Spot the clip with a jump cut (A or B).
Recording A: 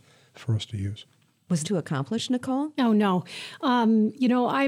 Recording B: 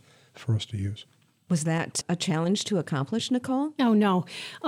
A